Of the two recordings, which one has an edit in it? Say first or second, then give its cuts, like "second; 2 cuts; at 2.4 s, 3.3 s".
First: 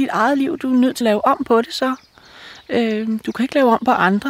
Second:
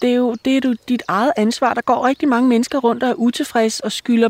first; 1 cut; at 1.0 s